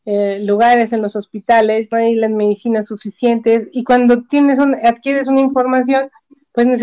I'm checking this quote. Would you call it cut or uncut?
cut